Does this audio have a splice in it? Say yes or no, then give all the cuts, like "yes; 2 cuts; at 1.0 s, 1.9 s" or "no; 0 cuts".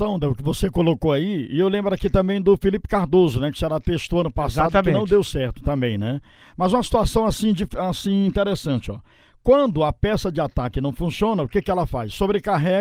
no; 0 cuts